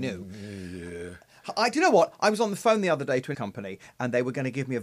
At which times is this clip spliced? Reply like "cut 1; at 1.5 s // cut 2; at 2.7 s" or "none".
cut 1; at 3.3 s